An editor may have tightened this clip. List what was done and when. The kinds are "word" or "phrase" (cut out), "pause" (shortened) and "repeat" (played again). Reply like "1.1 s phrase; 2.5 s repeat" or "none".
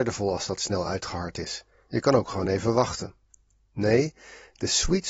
none